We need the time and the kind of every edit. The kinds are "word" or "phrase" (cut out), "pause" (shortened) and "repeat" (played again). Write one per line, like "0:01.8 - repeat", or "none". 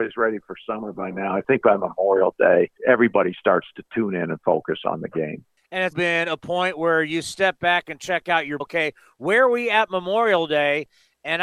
0:02.8 - pause
0:05.9 - word
0:08.6 - phrase